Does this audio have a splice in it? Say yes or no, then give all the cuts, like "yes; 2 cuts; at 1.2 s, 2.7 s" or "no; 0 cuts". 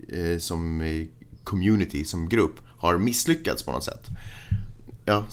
no; 0 cuts